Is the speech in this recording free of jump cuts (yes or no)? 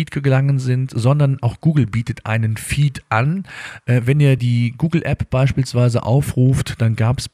yes